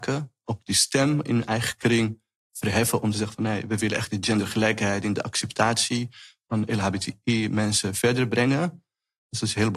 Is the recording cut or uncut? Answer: uncut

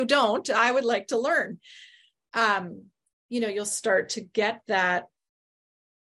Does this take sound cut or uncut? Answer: uncut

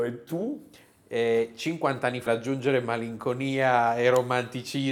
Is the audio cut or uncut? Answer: cut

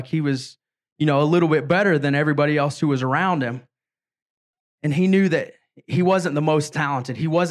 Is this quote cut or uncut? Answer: uncut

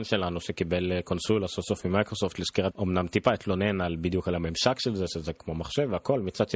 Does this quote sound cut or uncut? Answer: cut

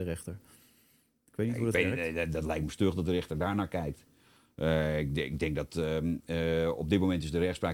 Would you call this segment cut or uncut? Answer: uncut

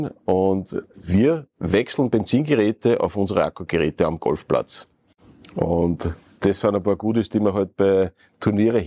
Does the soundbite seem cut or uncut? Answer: uncut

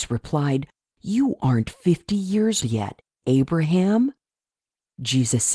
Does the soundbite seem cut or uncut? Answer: cut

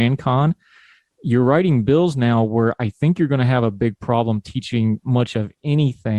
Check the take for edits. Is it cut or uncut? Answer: uncut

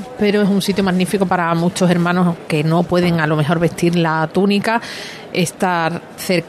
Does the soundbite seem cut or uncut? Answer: uncut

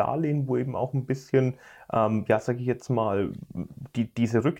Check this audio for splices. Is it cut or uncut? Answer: uncut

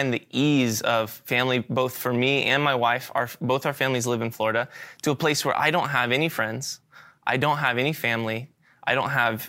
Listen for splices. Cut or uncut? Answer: uncut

